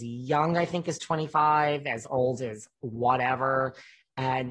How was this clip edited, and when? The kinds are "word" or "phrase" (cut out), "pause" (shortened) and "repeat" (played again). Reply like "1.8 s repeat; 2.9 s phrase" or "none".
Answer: none